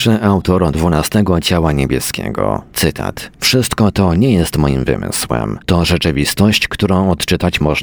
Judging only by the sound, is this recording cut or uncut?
cut